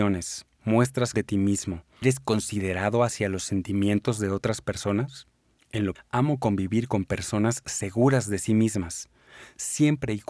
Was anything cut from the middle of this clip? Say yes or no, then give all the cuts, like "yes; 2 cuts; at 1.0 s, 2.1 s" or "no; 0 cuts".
yes; 3 cuts; at 1.1 s, 2.0 s, 5.9 s